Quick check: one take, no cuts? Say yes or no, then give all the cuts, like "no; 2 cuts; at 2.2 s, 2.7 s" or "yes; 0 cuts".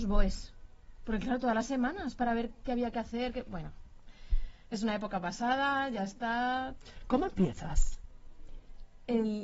yes; 0 cuts